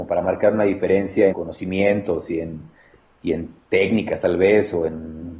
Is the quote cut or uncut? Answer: cut